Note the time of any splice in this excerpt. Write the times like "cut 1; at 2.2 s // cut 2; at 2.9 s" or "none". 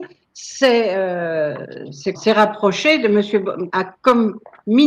cut 1; at 2.1 s // cut 2; at 3.7 s